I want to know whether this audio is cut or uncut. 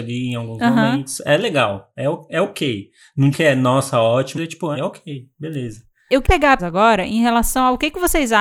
cut